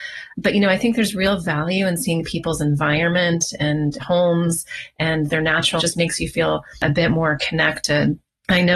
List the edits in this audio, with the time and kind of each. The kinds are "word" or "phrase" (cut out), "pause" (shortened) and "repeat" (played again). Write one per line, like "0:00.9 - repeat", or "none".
0:04.0 - word
0:05.8 - word